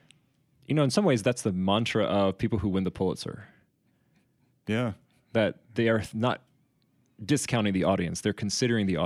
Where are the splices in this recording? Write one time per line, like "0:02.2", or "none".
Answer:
none